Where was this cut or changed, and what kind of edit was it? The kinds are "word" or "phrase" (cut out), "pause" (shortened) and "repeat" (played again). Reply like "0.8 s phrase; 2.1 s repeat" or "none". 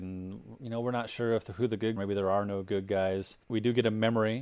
2.0 s phrase; 3.4 s pause